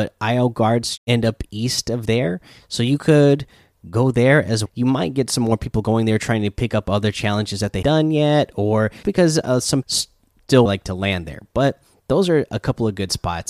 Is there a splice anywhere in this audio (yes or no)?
yes